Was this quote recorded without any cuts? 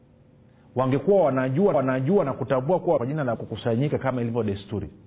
no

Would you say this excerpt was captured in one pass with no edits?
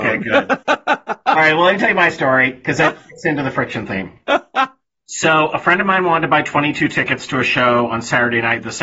yes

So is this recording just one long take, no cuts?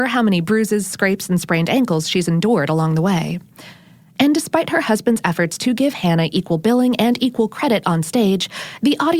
yes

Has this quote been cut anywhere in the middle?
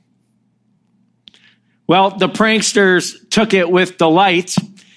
no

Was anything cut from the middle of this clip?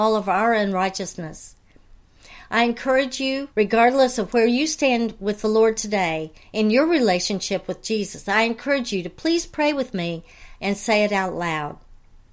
yes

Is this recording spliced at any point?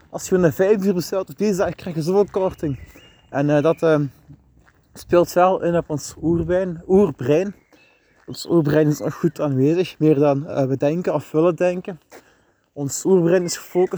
no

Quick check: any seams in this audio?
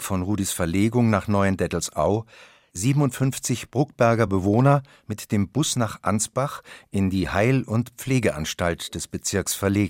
no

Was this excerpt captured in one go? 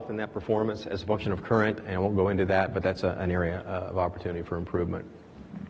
yes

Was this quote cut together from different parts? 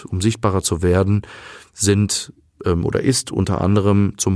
no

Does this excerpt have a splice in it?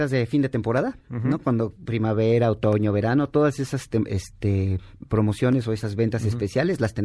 no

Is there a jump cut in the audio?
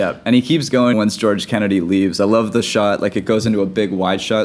yes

